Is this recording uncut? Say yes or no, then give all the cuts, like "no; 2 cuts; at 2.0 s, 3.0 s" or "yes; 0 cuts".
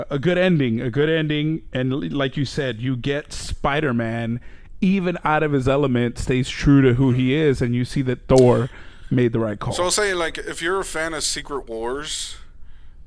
yes; 0 cuts